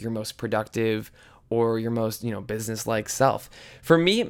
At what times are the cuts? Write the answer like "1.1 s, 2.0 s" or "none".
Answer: none